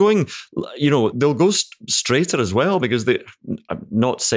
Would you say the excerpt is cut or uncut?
cut